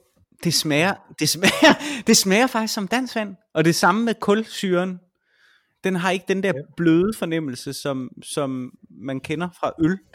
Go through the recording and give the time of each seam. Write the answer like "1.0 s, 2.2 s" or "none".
none